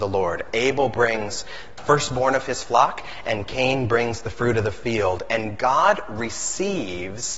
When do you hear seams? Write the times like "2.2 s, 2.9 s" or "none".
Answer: 1.8 s